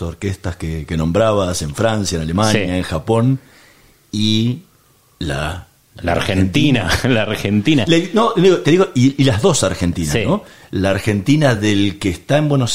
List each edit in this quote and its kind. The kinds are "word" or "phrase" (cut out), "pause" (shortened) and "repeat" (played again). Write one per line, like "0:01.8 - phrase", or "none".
none